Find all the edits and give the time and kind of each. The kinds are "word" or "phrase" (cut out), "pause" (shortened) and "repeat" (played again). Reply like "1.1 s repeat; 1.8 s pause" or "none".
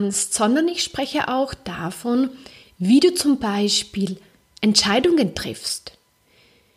none